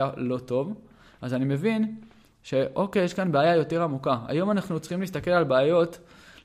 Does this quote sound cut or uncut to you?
uncut